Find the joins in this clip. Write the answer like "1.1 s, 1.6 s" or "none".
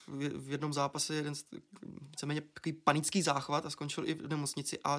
none